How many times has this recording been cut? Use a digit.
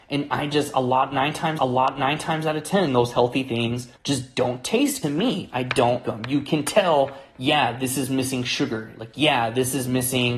5